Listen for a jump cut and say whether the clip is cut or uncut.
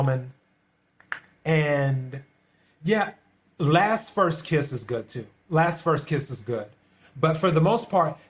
uncut